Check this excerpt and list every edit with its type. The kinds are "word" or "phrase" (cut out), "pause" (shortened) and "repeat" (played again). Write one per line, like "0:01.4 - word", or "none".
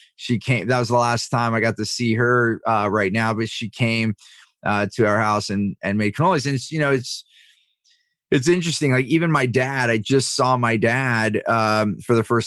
none